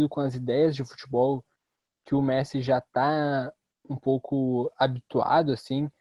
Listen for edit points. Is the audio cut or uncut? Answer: uncut